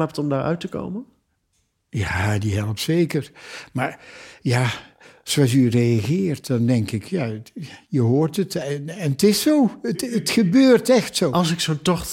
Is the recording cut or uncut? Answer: uncut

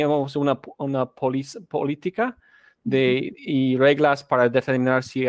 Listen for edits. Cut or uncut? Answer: uncut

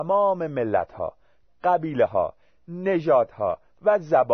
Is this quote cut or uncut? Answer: uncut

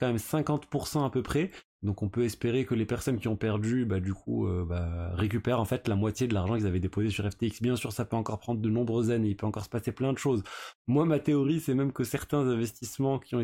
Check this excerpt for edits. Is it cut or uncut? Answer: uncut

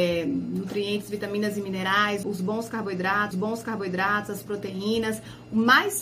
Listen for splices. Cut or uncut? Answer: cut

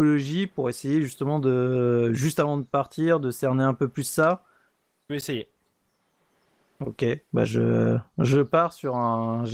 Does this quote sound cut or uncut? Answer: uncut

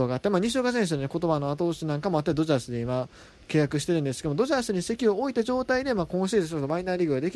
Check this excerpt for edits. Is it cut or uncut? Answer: uncut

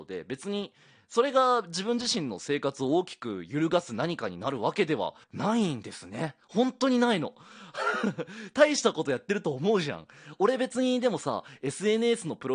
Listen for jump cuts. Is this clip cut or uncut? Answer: cut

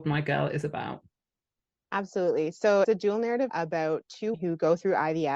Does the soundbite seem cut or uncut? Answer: cut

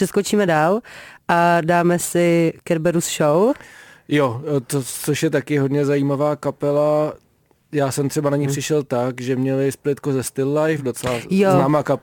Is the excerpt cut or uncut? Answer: uncut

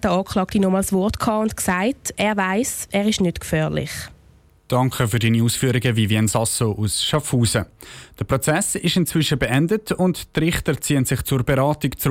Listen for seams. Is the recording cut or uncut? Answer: uncut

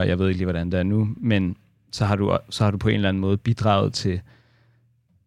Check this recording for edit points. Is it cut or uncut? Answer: uncut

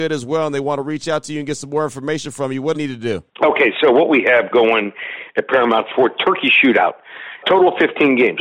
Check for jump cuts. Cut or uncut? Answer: cut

